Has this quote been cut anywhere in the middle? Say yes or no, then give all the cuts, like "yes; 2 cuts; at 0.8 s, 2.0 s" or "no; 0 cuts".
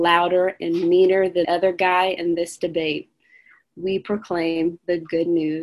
yes; 1 cut; at 1.4 s